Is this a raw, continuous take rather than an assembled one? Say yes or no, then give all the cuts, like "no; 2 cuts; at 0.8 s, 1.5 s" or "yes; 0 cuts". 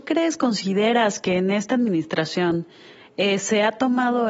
yes; 0 cuts